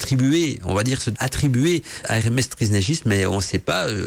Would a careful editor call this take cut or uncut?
cut